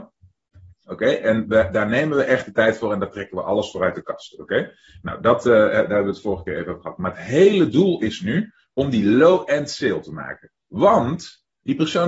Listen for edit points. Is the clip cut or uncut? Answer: uncut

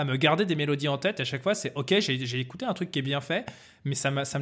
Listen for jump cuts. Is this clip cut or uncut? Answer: uncut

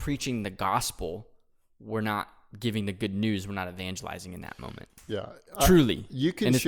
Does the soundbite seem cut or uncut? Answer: uncut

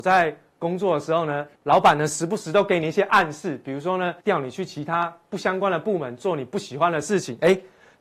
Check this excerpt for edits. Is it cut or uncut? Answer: cut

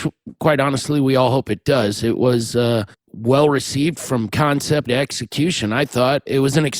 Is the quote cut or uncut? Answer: cut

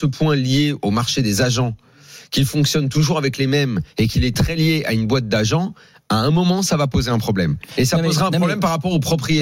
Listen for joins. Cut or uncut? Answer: uncut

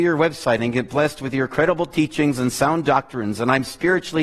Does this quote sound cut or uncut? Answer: uncut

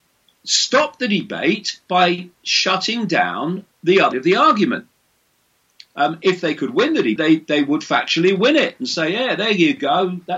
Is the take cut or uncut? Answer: cut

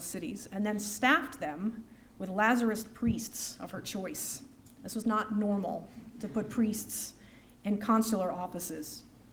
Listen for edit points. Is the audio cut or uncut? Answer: uncut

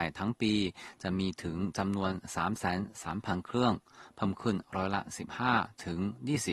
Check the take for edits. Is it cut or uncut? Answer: uncut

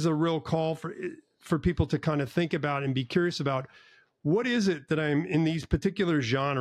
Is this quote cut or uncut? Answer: uncut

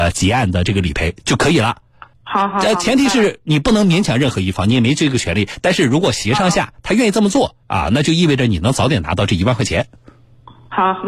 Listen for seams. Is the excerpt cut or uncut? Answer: cut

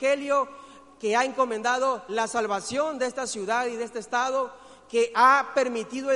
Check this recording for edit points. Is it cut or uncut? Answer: uncut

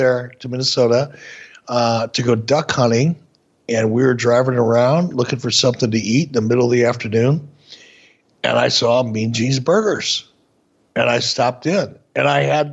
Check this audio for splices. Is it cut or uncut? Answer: uncut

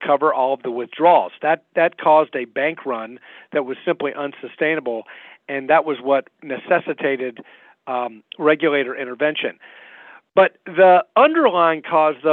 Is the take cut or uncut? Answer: uncut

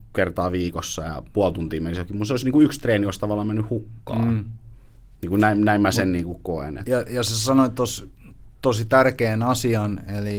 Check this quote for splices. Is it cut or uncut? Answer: uncut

